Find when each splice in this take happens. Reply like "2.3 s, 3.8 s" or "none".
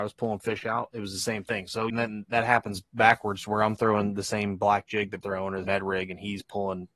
1.9 s, 5.2 s, 5.7 s